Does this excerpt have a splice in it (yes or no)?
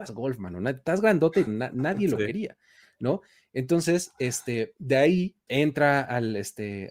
yes